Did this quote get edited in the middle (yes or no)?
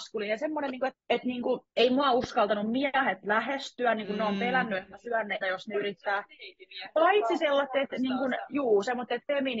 yes